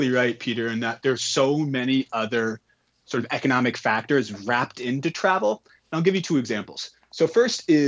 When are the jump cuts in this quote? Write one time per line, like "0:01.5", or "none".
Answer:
none